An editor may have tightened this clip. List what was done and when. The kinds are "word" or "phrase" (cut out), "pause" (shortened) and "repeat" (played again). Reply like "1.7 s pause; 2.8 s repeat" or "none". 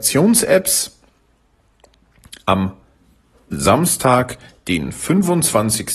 none